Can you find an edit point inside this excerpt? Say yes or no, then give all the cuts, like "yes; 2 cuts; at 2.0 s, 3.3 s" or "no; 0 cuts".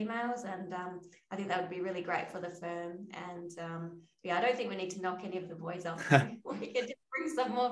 no; 0 cuts